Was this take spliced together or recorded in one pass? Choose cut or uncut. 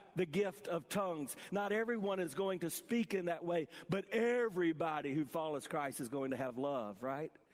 uncut